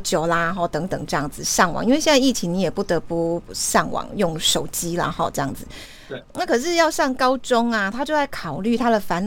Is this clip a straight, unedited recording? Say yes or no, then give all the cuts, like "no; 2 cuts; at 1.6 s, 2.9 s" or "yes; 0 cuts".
yes; 0 cuts